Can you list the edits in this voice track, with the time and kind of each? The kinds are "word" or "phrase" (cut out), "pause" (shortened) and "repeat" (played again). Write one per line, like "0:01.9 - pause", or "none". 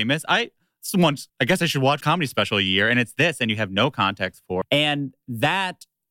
0:01.3 - pause
0:02.0 - word
0:04.6 - word